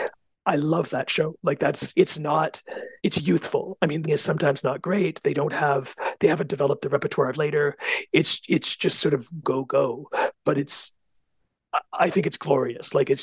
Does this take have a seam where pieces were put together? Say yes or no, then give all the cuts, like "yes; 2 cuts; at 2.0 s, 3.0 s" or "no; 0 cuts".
yes; 5 cuts; at 1.9 s, 3.0 s, 4.0 s, 7.3 s, 9.4 s